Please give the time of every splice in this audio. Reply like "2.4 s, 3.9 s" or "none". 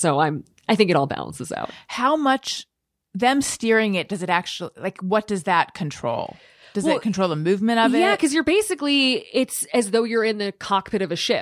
none